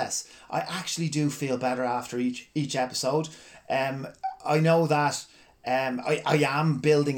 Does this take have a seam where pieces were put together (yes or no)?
no